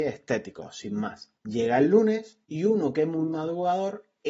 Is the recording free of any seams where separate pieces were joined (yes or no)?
no